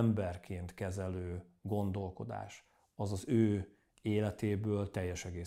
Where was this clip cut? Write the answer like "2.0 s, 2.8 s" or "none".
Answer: none